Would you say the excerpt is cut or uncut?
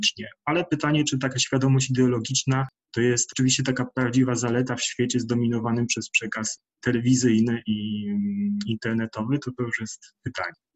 uncut